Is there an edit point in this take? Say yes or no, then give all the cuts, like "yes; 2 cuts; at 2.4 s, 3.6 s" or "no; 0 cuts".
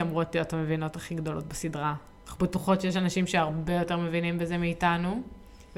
no; 0 cuts